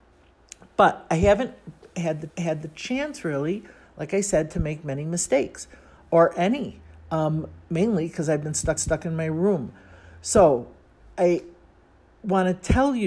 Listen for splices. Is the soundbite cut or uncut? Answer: cut